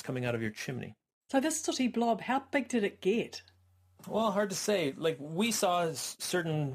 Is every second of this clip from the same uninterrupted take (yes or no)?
yes